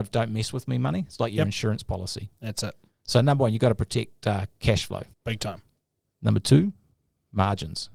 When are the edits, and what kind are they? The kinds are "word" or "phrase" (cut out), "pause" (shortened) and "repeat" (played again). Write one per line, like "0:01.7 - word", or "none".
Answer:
0:05.1 - pause